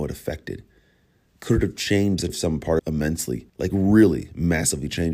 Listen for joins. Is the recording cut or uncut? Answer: cut